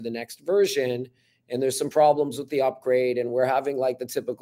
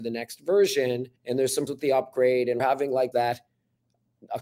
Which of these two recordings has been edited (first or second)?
second